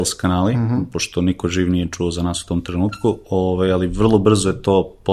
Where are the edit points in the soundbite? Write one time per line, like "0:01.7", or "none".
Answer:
none